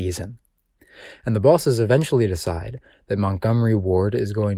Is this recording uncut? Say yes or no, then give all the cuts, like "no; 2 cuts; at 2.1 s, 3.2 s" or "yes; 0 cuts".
yes; 0 cuts